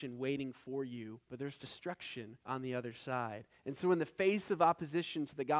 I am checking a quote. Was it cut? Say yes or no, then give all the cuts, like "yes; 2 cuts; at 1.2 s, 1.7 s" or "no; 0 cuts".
yes; 2 cuts; at 1.2 s, 2.4 s